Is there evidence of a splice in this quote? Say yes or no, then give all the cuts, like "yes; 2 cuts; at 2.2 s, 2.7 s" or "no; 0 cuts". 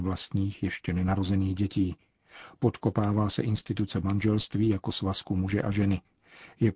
no; 0 cuts